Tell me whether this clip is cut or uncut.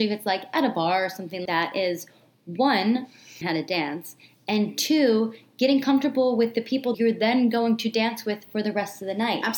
cut